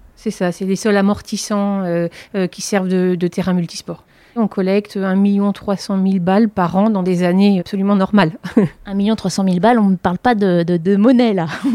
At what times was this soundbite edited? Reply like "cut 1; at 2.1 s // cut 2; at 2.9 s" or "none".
cut 1; at 7.6 s